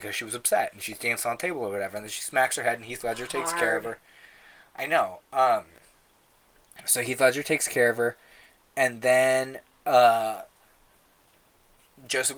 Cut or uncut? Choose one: uncut